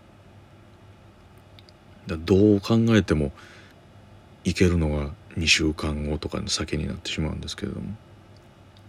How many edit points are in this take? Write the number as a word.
two